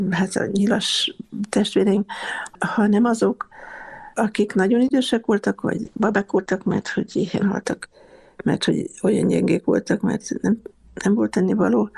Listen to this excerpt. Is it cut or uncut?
uncut